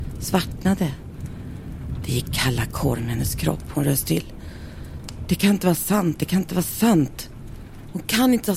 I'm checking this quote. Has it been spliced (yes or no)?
yes